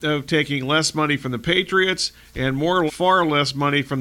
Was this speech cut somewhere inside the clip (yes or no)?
yes